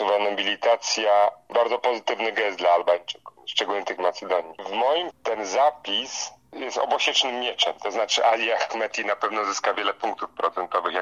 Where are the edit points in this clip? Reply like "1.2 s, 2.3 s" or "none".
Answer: 1.5 s, 4.0 s, 5.1 s